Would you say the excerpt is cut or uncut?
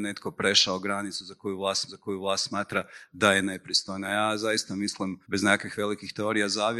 cut